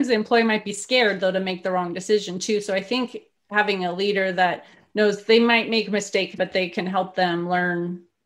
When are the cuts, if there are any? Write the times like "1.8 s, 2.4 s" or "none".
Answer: 6.4 s